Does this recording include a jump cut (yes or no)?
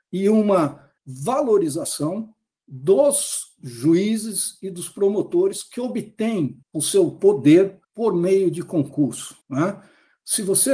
yes